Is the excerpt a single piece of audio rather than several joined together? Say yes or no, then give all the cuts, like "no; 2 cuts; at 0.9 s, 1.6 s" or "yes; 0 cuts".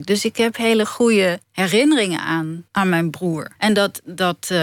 no; 3 cuts; at 1.4 s, 2.7 s, 3.6 s